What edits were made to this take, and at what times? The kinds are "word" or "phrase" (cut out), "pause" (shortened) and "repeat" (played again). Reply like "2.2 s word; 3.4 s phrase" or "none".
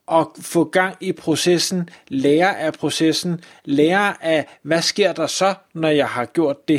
none